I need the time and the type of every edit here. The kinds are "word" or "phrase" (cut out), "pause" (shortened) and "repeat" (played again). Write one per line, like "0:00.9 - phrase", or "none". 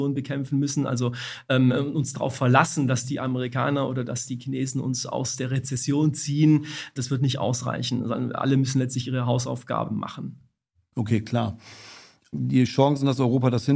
none